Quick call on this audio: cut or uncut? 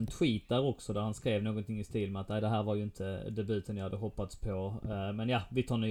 uncut